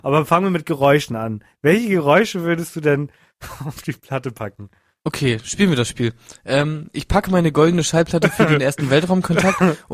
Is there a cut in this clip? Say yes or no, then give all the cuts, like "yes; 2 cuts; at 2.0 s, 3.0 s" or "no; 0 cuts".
no; 0 cuts